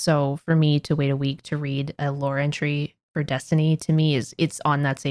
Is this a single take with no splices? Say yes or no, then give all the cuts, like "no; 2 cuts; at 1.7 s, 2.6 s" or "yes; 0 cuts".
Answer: yes; 0 cuts